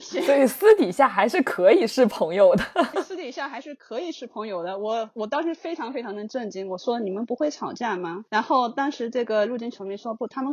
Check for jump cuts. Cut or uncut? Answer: cut